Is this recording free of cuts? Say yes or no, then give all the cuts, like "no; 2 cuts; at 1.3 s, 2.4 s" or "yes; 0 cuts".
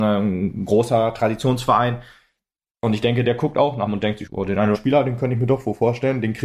no; 3 cuts; at 3.9 s, 4.3 s, 4.7 s